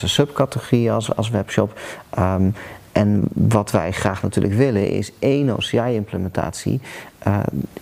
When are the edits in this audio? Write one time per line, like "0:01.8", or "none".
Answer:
0:02.9